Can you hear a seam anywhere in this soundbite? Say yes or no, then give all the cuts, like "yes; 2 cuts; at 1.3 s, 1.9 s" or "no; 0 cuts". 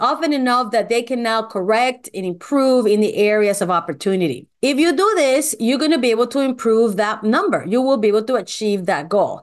no; 0 cuts